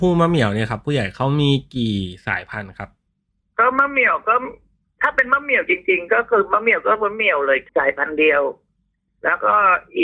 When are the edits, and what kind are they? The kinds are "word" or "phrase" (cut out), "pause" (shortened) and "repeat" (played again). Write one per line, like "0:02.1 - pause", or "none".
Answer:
0:07.7 - pause